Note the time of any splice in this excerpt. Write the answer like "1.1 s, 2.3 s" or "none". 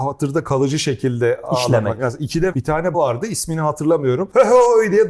2.5 s, 2.9 s